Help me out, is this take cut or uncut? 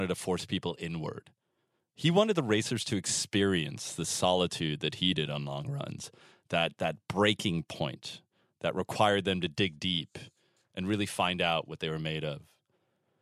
uncut